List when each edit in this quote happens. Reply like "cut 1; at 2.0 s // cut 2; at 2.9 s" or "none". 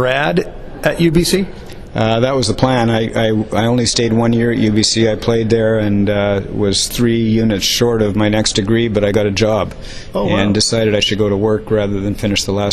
none